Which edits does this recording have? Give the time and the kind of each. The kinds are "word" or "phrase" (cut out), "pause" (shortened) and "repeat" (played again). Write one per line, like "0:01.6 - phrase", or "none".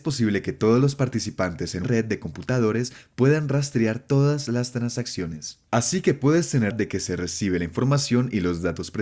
0:01.8 - phrase
0:05.7 - pause
0:06.7 - phrase